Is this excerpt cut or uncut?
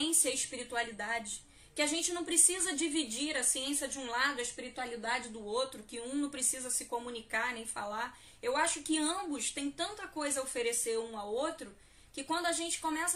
uncut